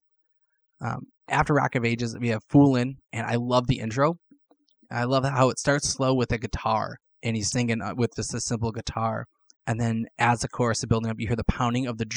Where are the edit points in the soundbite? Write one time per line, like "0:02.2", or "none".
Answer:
0:03.0
0:07.0
0:07.5